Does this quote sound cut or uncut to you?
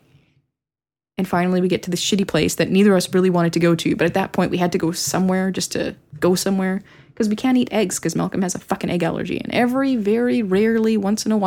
uncut